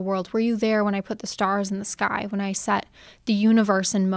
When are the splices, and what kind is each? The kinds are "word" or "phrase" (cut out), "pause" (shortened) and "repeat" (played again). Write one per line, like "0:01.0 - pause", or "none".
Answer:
none